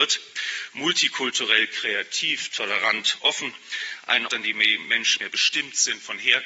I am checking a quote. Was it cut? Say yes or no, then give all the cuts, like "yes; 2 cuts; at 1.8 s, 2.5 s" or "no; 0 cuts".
yes; 3 cuts; at 3.2 s, 4.3 s, 5.2 s